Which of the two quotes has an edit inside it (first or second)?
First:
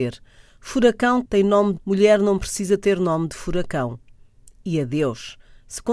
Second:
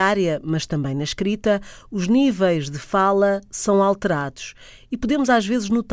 first